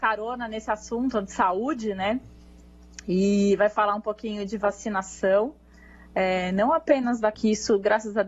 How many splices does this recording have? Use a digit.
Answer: 1